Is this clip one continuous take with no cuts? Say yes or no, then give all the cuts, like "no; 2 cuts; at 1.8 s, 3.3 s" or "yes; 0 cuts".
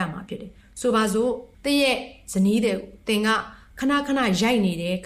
no; 1 cut; at 1.5 s